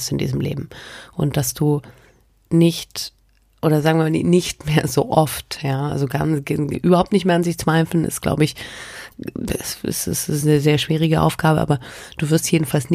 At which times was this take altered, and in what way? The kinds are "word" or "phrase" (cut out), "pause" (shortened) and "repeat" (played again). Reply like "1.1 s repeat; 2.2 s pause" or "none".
none